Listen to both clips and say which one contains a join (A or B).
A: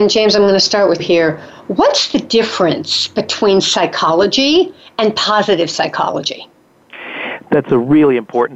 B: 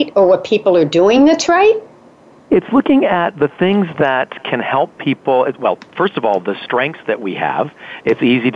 A